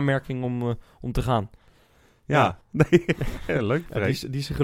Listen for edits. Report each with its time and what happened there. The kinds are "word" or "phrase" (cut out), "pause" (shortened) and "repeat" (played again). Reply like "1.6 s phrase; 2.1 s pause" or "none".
2.6 s pause